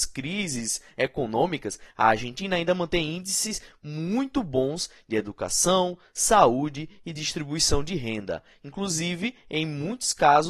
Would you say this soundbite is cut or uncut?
uncut